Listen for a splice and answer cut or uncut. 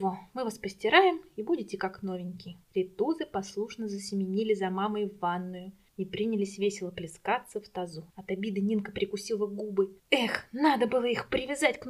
cut